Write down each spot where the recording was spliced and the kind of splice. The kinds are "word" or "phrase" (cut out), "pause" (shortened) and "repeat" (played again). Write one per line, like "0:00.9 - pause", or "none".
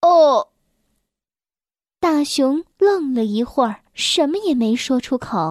0:02.7 - pause
0:03.9 - pause